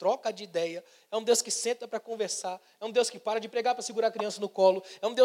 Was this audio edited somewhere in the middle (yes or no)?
no